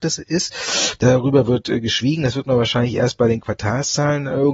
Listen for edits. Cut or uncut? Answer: uncut